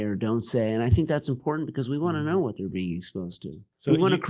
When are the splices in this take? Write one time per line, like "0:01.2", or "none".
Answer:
none